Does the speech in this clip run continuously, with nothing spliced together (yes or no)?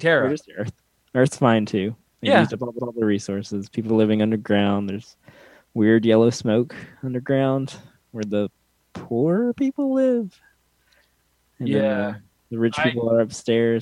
no